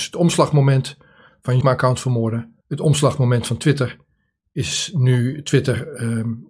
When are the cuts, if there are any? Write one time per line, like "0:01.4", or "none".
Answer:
0:01.6
0:02.6